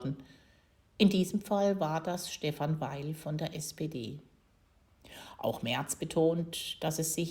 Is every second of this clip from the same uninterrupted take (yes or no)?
yes